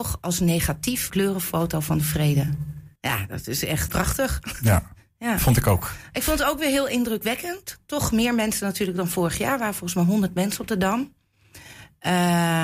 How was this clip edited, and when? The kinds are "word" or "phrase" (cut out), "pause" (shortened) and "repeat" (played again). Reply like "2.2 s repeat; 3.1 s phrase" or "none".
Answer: 1.1 s phrase; 3.0 s pause; 3.9 s word